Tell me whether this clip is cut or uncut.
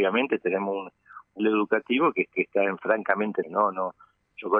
cut